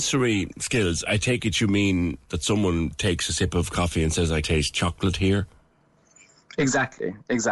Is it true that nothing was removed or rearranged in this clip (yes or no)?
no